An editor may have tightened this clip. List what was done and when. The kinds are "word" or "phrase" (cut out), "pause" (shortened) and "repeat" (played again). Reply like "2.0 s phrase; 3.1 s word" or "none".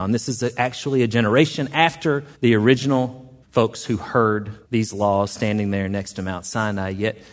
2.3 s pause; 3.4 s pause; 4.6 s pause